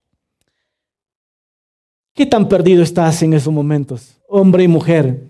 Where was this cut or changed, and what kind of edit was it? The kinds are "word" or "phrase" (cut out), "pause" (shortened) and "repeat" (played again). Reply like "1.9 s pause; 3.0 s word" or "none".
4.2 s pause